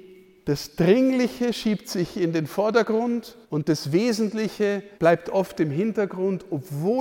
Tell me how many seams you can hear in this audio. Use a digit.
2